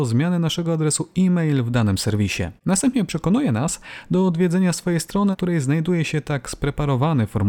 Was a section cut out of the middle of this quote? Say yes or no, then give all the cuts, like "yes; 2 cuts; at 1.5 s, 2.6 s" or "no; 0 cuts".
yes; 2 cuts; at 2.6 s, 5.3 s